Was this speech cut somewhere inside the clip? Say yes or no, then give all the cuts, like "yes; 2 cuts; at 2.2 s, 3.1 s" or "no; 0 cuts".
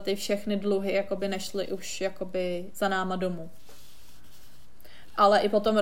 no; 0 cuts